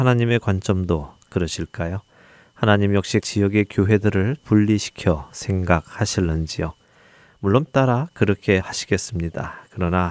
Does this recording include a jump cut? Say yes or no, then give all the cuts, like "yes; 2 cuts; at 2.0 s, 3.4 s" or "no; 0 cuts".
yes; 4 cuts; at 3.2 s, 4.4 s, 7.7 s, 8.6 s